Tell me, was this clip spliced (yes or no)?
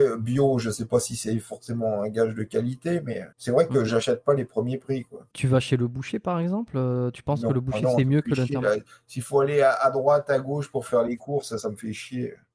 yes